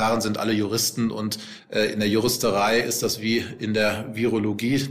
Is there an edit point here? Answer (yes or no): no